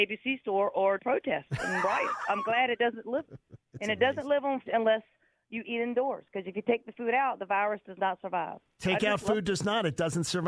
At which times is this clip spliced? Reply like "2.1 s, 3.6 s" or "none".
1.0 s, 3.3 s, 4.7 s

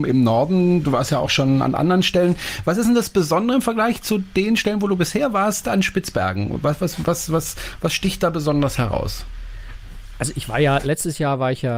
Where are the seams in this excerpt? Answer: none

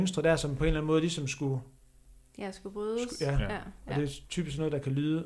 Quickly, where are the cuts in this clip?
none

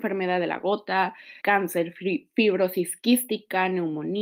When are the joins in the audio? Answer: 1.4 s

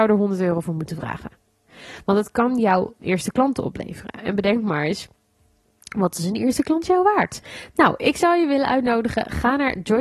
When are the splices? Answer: none

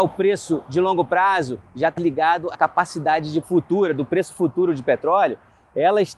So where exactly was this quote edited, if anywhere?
2.0 s, 2.5 s, 3.4 s

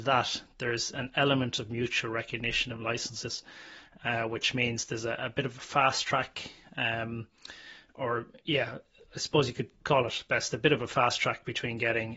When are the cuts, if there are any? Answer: none

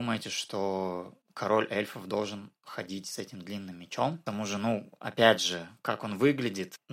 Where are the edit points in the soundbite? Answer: 1.2 s

